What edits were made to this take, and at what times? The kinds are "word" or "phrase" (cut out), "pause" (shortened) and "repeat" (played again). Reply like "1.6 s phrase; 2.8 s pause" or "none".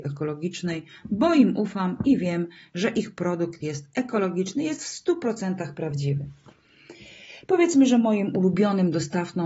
none